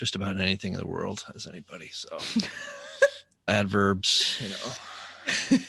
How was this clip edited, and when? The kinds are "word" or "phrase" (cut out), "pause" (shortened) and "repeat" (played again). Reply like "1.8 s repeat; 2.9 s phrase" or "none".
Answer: 3.5 s word